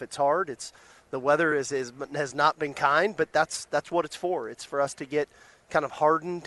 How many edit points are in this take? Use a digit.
0